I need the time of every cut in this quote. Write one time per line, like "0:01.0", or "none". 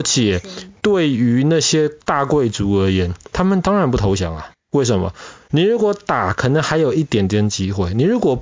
0:02.0